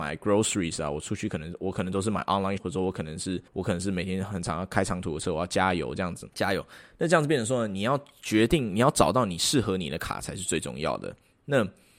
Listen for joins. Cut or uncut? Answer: cut